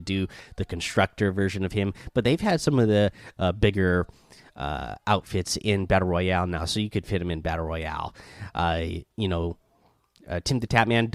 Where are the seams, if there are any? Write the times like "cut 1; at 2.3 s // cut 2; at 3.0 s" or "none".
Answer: none

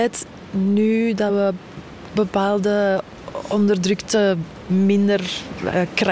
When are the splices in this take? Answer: none

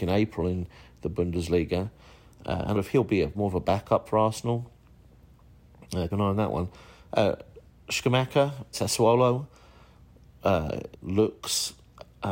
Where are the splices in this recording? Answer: cut 1; at 2.7 s // cut 2; at 3.3 s // cut 3; at 4.1 s // cut 4; at 6.1 s // cut 5; at 8.7 s // cut 6; at 10.9 s

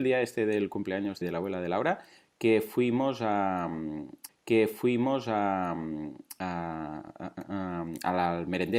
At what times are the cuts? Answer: cut 1; at 1.2 s // cut 2; at 4.3 s

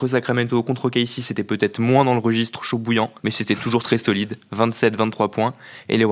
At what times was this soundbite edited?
cut 1; at 3.2 s

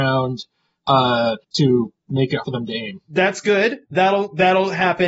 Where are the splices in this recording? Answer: cut 1; at 1.4 s // cut 2; at 2.4 s

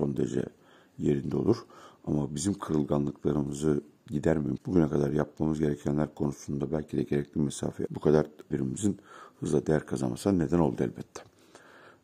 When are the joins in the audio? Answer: cut 1; at 4.6 s // cut 2; at 7.9 s // cut 3; at 8.5 s

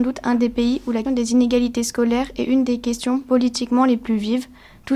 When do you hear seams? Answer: cut 1; at 1.0 s

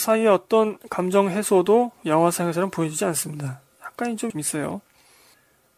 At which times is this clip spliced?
cut 1; at 4.3 s

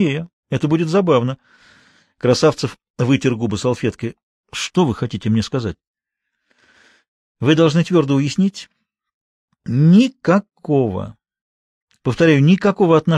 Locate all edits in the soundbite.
none

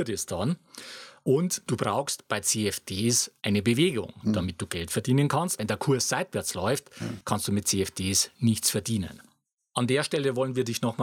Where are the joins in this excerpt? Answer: cut 1; at 3.4 s

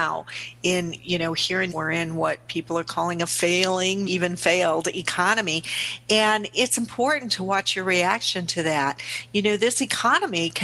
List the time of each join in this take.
cut 1; at 1.0 s // cut 2; at 1.7 s // cut 3; at 4.1 s

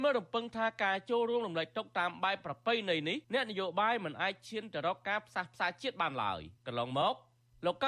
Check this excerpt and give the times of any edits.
cut 1; at 3.2 s // cut 2; at 6.6 s

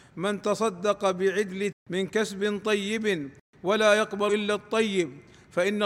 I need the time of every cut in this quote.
cut 1; at 1.7 s // cut 2; at 4.3 s

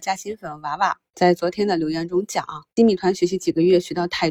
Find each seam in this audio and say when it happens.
cut 1; at 1.1 s // cut 2; at 2.7 s

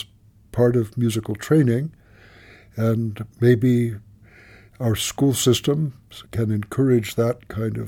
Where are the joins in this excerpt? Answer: cut 1; at 6.3 s

